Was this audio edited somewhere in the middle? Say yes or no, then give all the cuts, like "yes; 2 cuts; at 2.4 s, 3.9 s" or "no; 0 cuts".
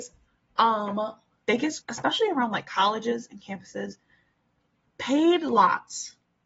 yes; 2 cuts; at 1.4 s, 1.8 s